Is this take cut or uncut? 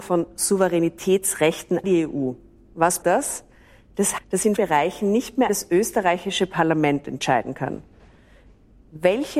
cut